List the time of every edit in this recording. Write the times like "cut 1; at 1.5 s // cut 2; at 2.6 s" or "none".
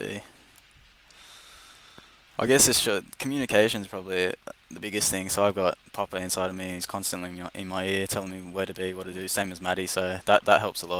none